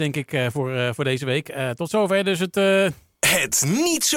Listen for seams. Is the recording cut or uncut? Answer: uncut